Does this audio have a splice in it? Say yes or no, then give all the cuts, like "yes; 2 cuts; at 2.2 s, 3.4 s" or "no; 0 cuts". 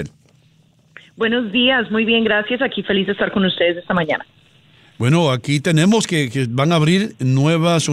no; 0 cuts